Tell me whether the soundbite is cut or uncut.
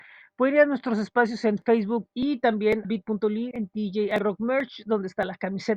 cut